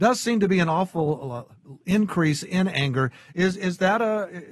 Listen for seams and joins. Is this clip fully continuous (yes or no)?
yes